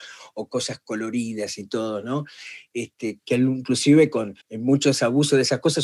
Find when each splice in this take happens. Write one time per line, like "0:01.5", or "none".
0:03.2
0:04.4